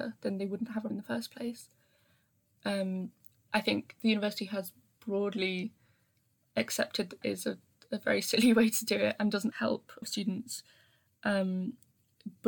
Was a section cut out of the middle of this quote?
yes; 5 cuts; at 0.9 s, 3.5 s, 7.2 s, 9.5 s, 10.0 s

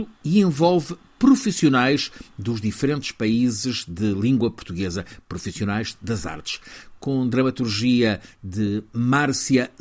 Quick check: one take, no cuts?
yes; 0 cuts

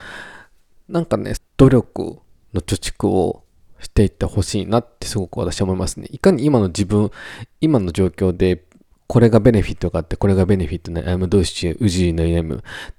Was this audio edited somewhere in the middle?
yes; 1 cut; at 1.4 s

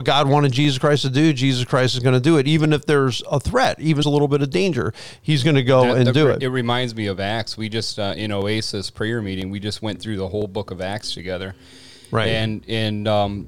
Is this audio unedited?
no; 1 cut; at 4.0 s

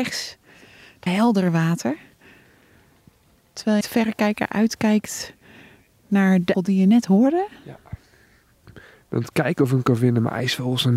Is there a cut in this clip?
yes; 3 cuts; at 1.1 s, 3.8 s, 6.5 s

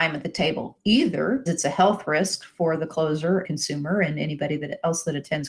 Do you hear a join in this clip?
yes; 2 cuts; at 1.5 s, 3.4 s

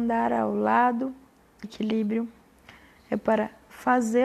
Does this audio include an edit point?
yes; 1 cut; at 1.6 s

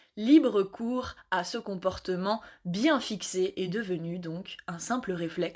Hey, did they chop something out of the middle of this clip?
no; 0 cuts

